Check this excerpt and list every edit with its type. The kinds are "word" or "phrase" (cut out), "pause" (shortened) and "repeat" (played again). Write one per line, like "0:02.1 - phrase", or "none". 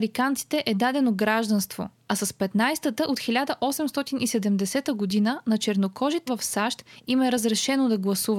0:06.3 - word